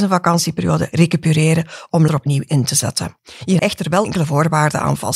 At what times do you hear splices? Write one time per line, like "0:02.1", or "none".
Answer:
0:02.1
0:03.6